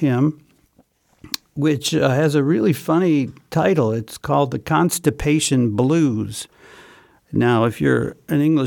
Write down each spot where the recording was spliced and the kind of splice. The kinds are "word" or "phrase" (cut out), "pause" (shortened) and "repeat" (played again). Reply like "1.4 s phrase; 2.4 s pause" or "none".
none